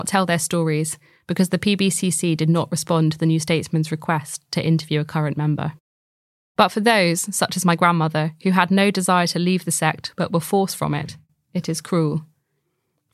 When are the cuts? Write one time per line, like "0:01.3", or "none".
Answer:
none